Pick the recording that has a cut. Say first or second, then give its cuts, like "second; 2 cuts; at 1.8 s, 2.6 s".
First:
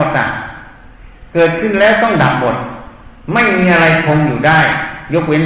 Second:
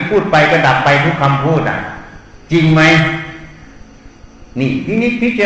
second; 1 cut; at 4.5 s